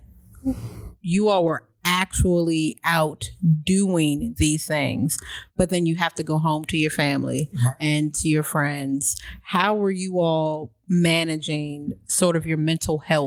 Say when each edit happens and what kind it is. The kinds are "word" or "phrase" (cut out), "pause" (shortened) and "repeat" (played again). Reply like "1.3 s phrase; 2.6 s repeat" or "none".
none